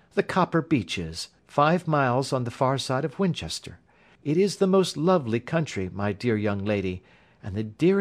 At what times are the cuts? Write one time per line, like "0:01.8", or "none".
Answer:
none